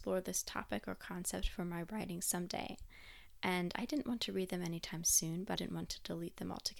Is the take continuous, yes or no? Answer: no